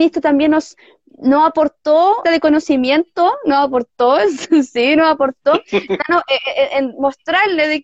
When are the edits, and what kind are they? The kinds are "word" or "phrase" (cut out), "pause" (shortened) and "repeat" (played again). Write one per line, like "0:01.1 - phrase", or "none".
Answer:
0:02.2 - phrase